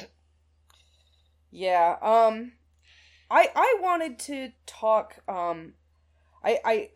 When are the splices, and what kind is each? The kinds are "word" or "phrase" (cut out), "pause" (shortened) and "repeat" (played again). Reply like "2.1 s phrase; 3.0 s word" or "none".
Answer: 4.6 s pause